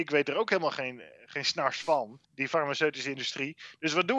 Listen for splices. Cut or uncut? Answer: cut